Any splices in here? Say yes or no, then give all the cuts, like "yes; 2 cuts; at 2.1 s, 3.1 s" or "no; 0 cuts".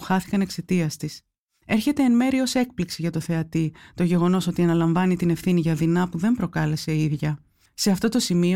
no; 0 cuts